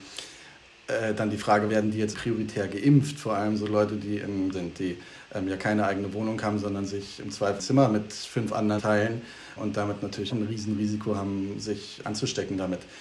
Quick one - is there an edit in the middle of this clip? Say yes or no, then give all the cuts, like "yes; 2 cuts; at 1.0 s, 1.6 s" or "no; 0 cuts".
yes; 8 cuts; at 1.7 s, 2.1 s, 4.5 s, 7.6 s, 8.8 s, 9.6 s, 10.3 s, 12.0 s